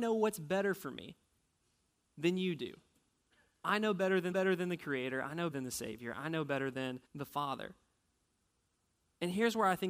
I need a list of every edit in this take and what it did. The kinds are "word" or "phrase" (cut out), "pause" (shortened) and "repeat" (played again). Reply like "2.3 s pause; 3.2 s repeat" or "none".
4.3 s repeat; 5.5 s word; 7.0 s pause